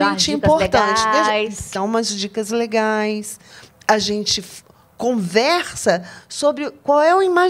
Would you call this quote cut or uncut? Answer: cut